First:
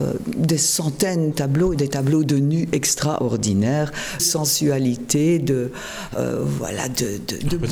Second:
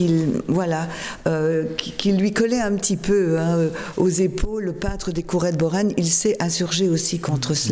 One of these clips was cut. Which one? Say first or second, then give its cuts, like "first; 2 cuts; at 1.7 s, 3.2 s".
first; 3 cuts; at 1.3 s, 1.7 s, 4.2 s